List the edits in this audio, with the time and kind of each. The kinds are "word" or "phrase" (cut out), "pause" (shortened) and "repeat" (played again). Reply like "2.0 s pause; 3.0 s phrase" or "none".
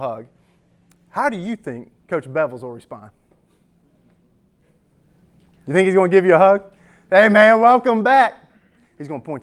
none